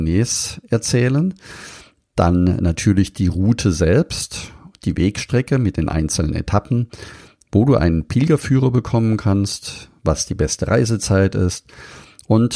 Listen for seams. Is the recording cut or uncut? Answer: uncut